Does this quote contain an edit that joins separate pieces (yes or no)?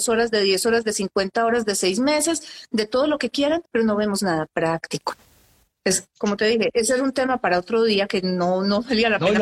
yes